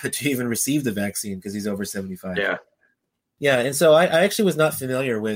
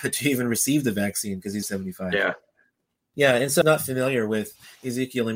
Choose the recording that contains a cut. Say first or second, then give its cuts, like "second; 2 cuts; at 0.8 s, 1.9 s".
second; 2 cuts; at 1.6 s, 3.6 s